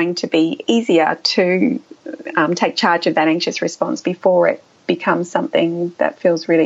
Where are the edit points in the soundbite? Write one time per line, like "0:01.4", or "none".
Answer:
none